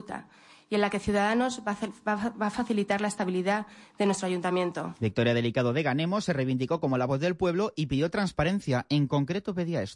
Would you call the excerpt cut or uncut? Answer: uncut